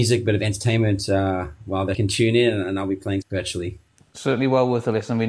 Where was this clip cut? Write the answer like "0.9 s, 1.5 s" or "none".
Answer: 1.9 s, 3.2 s